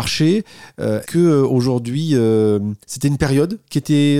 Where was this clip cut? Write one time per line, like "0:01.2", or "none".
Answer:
0:01.0
0:02.8

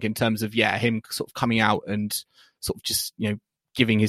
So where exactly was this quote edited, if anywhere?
none

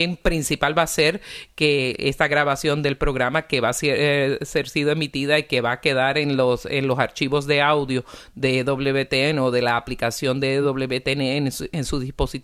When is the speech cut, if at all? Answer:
none

